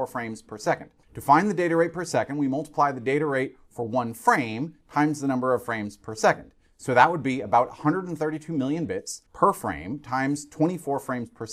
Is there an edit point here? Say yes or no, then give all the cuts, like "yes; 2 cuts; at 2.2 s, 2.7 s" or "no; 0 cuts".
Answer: yes; 2 cuts; at 1.0 s, 9.3 s